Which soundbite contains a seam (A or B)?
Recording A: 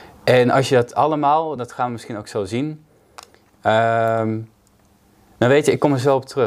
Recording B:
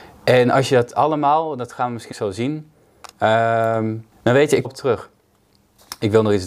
B